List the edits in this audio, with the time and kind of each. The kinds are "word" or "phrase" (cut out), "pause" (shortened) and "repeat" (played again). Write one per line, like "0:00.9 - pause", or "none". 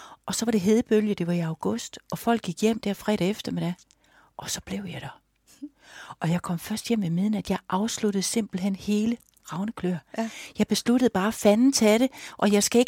none